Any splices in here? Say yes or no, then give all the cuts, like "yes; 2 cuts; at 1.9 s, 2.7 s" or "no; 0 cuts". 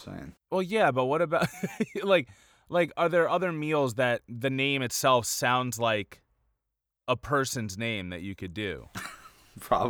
no; 0 cuts